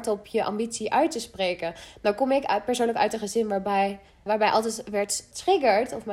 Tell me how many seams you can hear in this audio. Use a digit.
1